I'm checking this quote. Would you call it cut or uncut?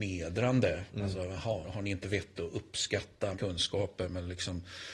cut